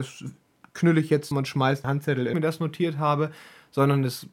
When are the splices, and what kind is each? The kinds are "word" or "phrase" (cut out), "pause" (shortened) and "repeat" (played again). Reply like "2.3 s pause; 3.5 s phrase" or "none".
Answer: 1.3 s word; 1.8 s word; 2.3 s phrase